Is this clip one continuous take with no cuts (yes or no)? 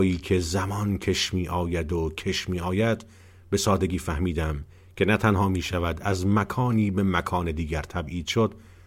yes